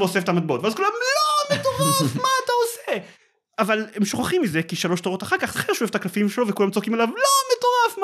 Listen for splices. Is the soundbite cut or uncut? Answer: cut